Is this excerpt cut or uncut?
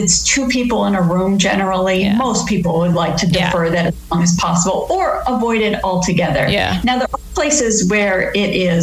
uncut